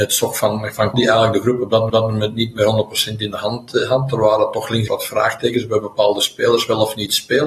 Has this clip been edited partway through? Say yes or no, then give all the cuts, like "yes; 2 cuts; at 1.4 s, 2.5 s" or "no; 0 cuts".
yes; 3 cuts; at 0.9 s, 1.9 s, 4.9 s